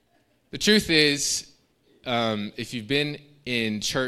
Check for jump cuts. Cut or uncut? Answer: uncut